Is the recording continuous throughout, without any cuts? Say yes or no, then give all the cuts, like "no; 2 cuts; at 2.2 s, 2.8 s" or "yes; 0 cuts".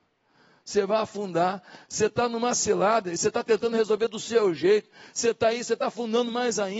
yes; 0 cuts